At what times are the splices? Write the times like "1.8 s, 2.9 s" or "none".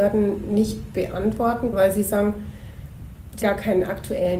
1.7 s, 3.4 s